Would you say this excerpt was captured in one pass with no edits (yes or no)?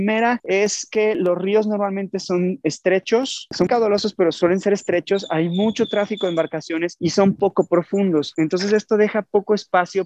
no